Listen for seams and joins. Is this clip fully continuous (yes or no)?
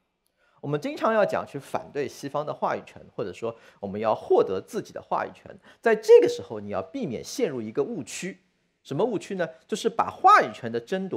yes